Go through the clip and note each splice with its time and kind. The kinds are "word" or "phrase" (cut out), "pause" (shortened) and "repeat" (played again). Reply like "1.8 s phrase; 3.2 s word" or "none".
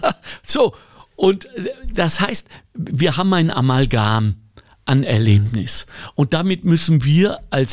none